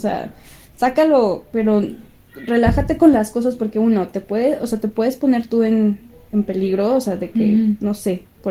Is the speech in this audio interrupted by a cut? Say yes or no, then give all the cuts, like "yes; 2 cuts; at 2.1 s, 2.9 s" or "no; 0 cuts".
no; 0 cuts